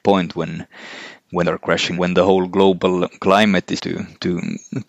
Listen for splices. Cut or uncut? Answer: cut